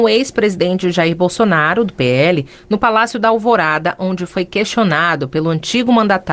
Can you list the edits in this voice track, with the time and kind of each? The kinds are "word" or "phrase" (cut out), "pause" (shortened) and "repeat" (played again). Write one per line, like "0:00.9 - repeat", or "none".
none